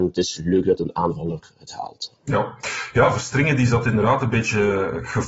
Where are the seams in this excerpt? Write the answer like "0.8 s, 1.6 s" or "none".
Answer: none